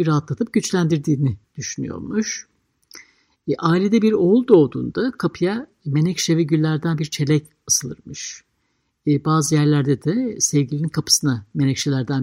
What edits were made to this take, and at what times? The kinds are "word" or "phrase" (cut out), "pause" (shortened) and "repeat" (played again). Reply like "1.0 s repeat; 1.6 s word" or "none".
none

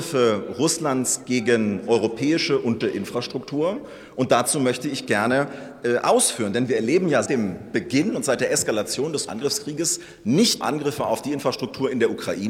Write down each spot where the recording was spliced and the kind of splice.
2.8 s word; 7.3 s word; 9.3 s word; 10.6 s word

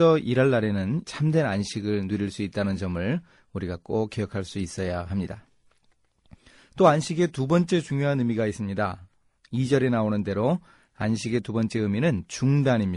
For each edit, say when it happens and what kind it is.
1.0 s phrase

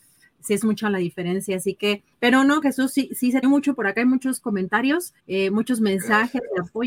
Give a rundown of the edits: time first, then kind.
2.1 s pause; 2.6 s word; 3.4 s phrase; 5.2 s pause

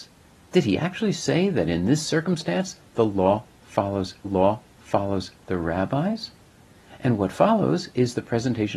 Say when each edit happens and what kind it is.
4.2 s repeat

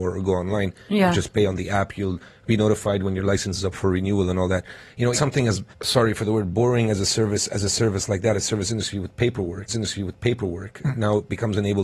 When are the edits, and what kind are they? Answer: 5.1 s word; 5.7 s pause; 9.7 s repeat

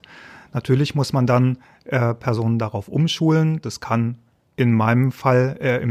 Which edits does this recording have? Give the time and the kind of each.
none

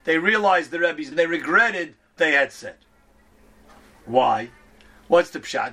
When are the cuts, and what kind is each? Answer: 1.1 s word; 2.2 s word

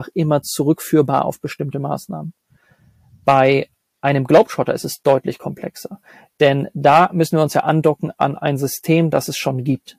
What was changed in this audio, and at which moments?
none

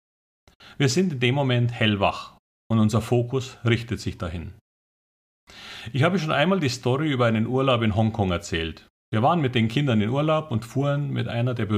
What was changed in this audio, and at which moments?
9.0 s pause

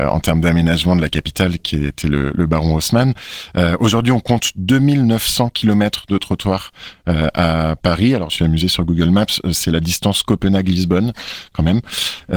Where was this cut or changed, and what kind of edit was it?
8.3 s phrase

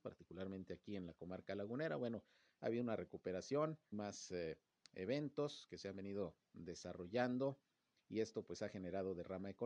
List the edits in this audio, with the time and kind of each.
3.9 s word

